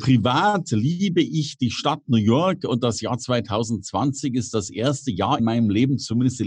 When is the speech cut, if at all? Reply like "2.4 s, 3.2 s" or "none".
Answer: 5.4 s